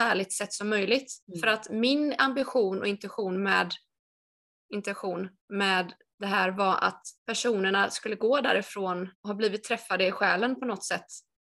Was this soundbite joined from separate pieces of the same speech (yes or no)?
yes